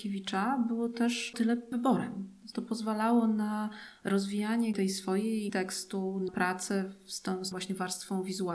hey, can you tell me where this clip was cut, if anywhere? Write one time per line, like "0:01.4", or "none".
0:01.3
0:01.7
0:02.5
0:05.5
0:06.3
0:07.5